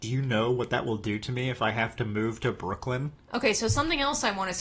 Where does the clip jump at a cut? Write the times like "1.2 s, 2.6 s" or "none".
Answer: none

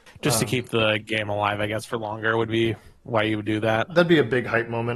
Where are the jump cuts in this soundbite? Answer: none

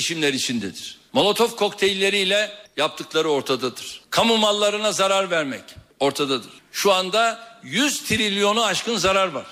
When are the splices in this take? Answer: none

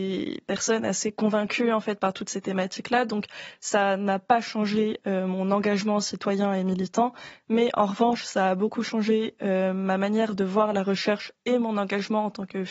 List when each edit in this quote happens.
none

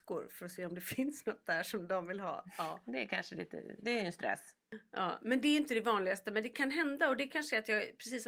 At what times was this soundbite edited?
3.8 s

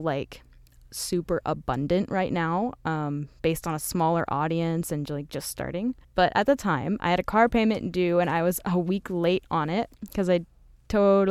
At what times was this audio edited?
6.0 s

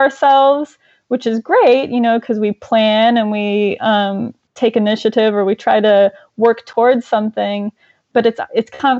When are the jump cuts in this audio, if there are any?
none

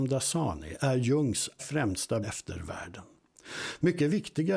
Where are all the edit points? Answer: 1.6 s, 2.2 s

